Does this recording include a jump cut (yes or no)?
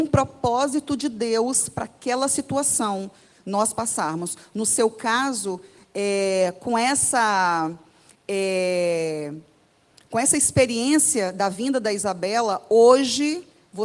no